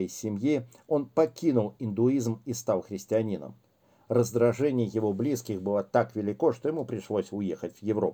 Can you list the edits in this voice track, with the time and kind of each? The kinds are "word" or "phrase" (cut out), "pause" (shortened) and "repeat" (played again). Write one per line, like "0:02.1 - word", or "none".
none